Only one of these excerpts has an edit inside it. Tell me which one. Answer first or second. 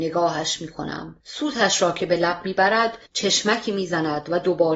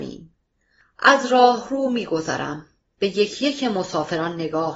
first